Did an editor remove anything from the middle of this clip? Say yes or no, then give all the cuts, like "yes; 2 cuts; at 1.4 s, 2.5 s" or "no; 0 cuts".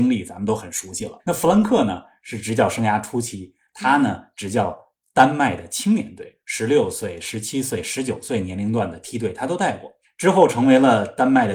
no; 0 cuts